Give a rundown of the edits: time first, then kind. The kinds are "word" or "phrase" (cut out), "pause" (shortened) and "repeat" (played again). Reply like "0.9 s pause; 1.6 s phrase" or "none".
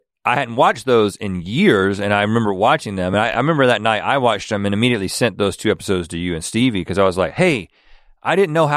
none